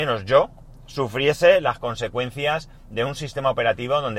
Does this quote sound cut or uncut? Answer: uncut